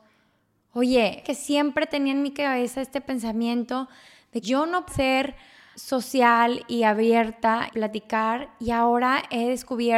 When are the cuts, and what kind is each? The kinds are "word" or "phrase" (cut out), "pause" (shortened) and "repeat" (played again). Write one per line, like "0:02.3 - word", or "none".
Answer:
0:01.2 - word
0:04.4 - word
0:04.9 - word
0:05.7 - word
0:07.7 - word